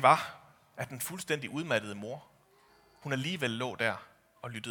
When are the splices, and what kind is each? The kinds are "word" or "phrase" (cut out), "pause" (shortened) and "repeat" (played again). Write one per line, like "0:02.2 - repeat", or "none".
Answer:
none